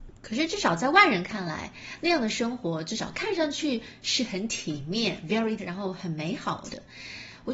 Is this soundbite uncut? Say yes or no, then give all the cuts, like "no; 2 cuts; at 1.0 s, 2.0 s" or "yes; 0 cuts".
no; 1 cut; at 5.6 s